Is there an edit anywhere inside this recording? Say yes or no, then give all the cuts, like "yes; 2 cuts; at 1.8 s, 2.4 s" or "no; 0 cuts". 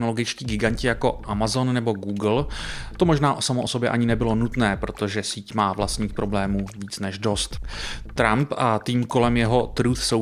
no; 0 cuts